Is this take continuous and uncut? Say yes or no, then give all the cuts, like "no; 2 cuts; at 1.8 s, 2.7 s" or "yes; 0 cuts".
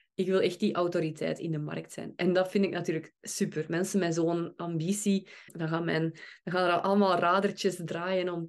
no; 1 cut; at 5.5 s